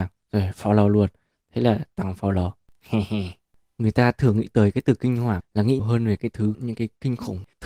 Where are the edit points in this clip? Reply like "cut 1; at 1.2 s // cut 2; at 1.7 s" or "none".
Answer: cut 1; at 5.4 s // cut 2; at 5.8 s // cut 3; at 6.2 s // cut 4; at 6.5 s

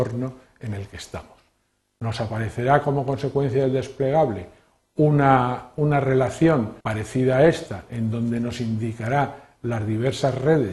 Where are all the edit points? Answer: cut 1; at 6.8 s

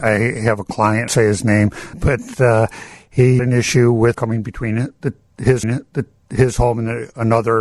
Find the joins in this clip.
cut 1; at 1.1 s // cut 2; at 1.9 s // cut 3; at 3.4 s // cut 4; at 4.1 s // cut 5; at 5.6 s

